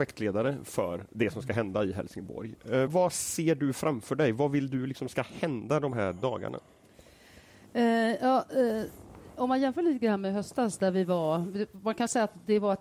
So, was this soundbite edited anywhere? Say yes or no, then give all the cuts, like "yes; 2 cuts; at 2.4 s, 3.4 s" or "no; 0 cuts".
yes; 1 cut; at 2.9 s